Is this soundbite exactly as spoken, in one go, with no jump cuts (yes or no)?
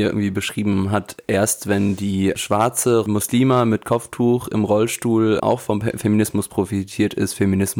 no